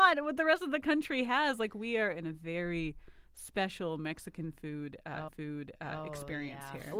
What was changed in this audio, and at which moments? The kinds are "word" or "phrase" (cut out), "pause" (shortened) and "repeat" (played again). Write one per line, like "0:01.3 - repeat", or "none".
0:05.3 - repeat